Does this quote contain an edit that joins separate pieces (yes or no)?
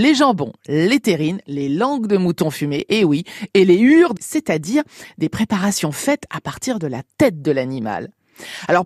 yes